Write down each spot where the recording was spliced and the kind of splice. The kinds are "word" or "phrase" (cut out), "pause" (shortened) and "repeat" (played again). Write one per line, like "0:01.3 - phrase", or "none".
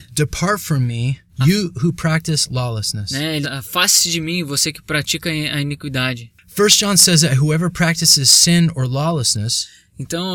0:01.3 - pause
0:03.4 - word